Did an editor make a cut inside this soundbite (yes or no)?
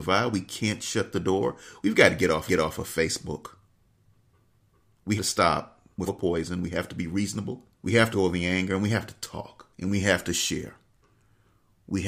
yes